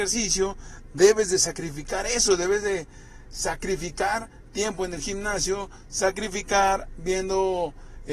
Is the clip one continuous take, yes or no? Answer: yes